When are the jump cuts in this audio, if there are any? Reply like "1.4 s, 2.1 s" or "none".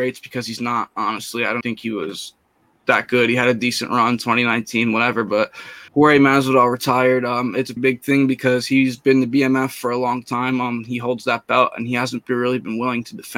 1.6 s, 5.9 s, 7.8 s